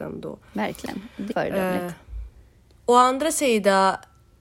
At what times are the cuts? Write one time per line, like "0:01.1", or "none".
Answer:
0:01.3